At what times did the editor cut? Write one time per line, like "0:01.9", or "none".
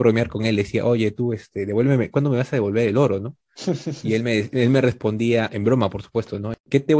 none